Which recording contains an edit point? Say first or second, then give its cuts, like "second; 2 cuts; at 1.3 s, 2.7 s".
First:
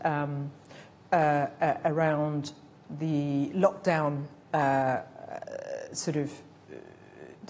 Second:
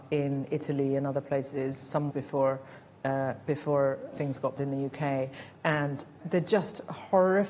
second; 4 cuts; at 2.1 s, 4.1 s, 4.6 s, 6.2 s